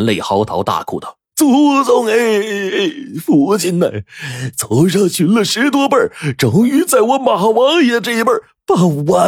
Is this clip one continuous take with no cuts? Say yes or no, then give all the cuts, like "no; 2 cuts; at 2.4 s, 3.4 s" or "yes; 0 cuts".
no; 1 cut; at 1.3 s